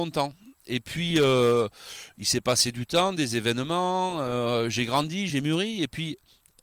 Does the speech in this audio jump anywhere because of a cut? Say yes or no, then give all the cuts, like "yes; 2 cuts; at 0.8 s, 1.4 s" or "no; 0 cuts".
no; 0 cuts